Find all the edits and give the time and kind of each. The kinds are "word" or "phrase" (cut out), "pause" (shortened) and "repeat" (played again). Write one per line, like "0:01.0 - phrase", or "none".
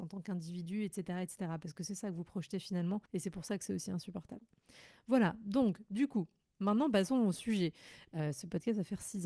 0:03.1 - pause